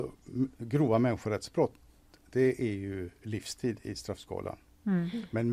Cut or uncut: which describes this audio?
uncut